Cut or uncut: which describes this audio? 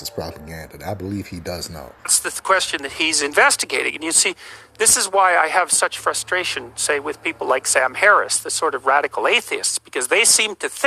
cut